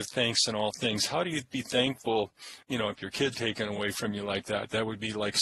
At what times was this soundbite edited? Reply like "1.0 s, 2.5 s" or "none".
2.6 s, 3.3 s